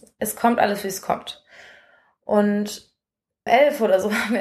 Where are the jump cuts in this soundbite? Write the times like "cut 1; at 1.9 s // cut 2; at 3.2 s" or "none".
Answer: cut 1; at 3.5 s